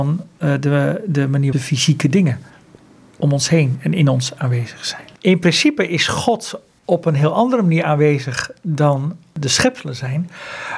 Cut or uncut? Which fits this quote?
cut